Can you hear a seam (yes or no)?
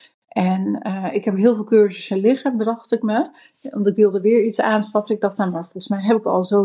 no